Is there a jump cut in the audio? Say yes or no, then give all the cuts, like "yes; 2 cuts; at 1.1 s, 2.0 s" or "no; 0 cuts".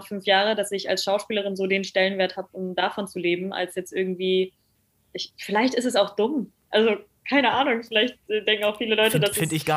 no; 0 cuts